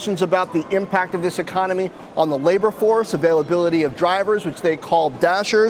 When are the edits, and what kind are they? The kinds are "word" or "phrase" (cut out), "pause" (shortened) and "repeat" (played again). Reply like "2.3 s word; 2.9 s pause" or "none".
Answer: none